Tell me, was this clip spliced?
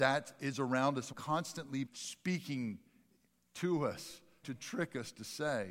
yes; 3 cuts; at 1.1 s, 1.9 s, 4.4 s

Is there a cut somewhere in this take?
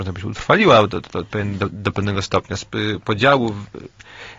no; 0 cuts

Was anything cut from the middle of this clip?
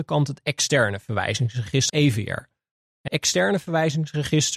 yes; 2 cuts; at 1.9 s, 3.1 s

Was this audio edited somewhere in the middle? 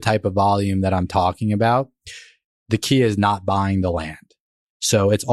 no; 0 cuts

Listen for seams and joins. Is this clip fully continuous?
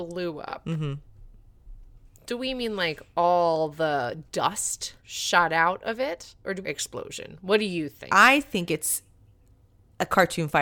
no; 3 cuts; at 5.0 s, 6.6 s, 8.1 s

